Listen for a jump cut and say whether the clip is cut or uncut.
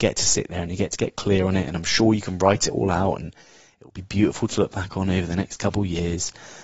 uncut